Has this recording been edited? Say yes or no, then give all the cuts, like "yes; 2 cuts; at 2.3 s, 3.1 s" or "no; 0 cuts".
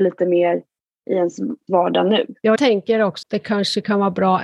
yes; 3 cuts; at 1.7 s, 2.6 s, 3.2 s